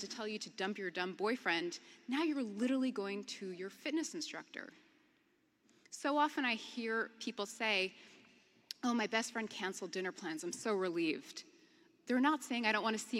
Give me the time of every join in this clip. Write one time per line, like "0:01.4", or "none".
none